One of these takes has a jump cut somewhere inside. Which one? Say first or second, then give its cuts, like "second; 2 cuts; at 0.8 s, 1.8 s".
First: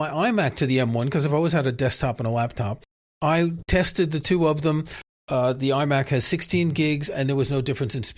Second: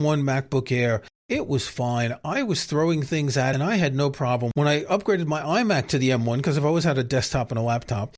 second; 1 cut; at 3.5 s